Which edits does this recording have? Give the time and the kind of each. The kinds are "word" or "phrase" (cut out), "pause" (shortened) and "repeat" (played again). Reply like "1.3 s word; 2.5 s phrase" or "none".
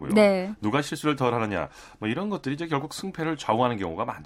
none